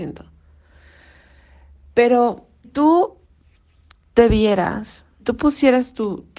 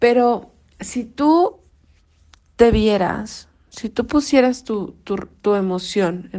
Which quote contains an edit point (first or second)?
first